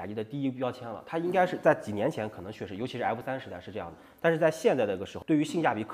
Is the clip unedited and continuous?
yes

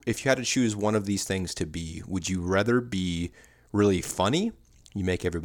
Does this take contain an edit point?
no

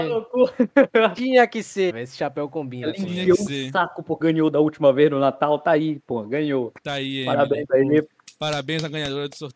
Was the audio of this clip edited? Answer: yes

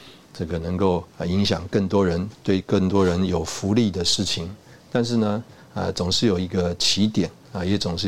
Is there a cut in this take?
yes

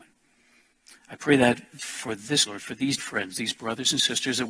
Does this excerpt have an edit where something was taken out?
yes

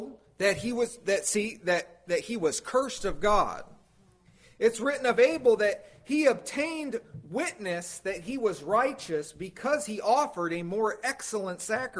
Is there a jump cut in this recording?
no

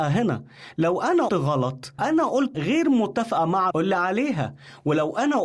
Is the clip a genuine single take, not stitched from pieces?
no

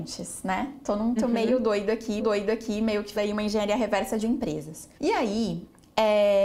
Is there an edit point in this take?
yes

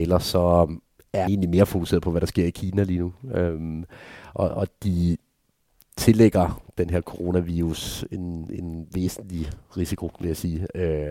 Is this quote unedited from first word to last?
no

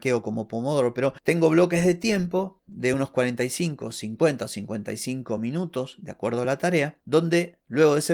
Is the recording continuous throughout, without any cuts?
yes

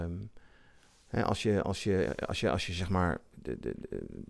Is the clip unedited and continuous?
yes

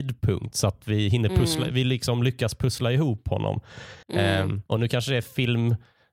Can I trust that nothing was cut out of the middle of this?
no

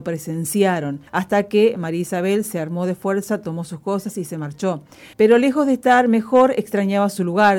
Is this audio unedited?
no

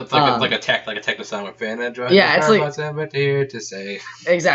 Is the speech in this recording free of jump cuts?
yes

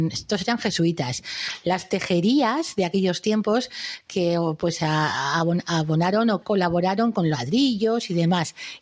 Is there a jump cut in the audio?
yes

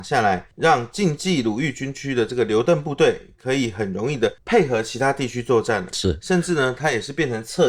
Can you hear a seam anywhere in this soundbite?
no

